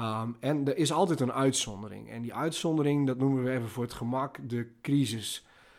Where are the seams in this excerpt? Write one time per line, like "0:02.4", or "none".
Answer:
none